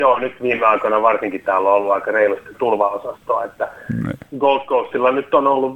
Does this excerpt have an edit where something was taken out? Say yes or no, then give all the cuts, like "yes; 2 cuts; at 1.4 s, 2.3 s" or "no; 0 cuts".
yes; 1 cut; at 2.5 s